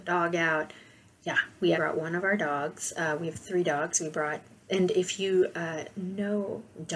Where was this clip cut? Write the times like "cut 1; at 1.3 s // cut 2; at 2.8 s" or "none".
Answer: cut 1; at 1.7 s // cut 2; at 4.6 s

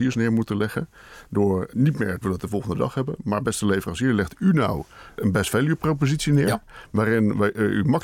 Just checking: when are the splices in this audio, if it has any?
cut 1; at 1.7 s // cut 2; at 2.2 s // cut 3; at 5.2 s

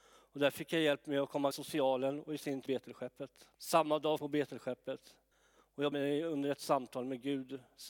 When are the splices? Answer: cut 1; at 1.5 s // cut 2; at 2.7 s // cut 3; at 3.5 s // cut 4; at 4.2 s // cut 5; at 5.3 s // cut 6; at 5.9 s

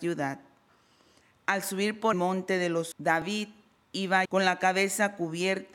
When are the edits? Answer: cut 1; at 2.1 s // cut 2; at 2.9 s // cut 3; at 4.3 s

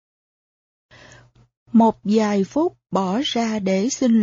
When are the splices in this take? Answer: none

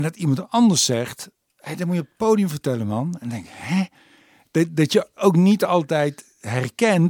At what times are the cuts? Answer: none

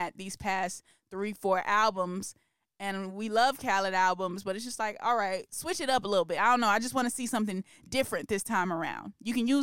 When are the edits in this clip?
none

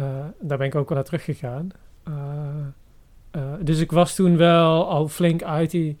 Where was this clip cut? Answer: cut 1; at 0.9 s

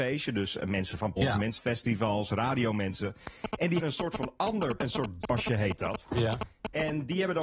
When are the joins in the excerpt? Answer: cut 1; at 1.2 s // cut 2; at 1.6 s // cut 3; at 3.8 s // cut 4; at 4.8 s // cut 5; at 5.2 s

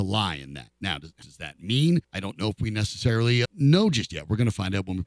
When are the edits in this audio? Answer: cut 1; at 1.2 s // cut 2; at 2.0 s // cut 3; at 3.4 s

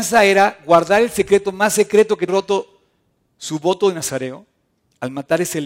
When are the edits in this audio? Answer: cut 1; at 2.3 s

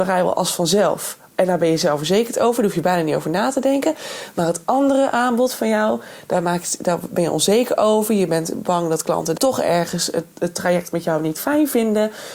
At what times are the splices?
cut 1; at 9.4 s

